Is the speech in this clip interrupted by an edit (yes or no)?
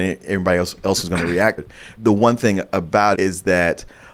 yes